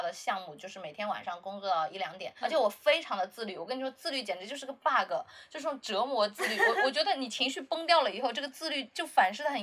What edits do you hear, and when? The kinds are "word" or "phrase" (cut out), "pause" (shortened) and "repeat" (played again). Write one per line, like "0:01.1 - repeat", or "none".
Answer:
0:02.4 - word